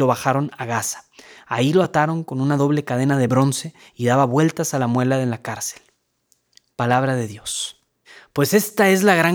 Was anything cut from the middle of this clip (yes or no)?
no